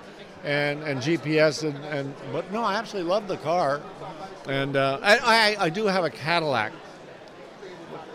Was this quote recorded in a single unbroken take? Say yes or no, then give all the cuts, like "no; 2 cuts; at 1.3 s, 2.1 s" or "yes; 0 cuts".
yes; 0 cuts